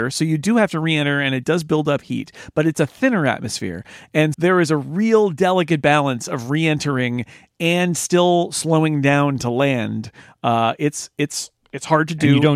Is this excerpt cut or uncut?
cut